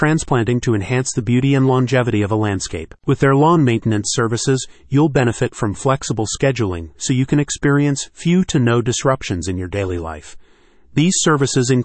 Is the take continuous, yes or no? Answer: yes